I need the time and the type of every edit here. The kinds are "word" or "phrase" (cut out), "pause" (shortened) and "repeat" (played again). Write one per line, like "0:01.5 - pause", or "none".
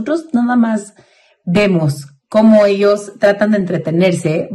none